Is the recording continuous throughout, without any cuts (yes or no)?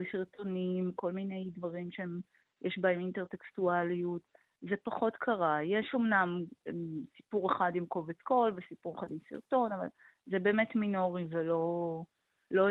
yes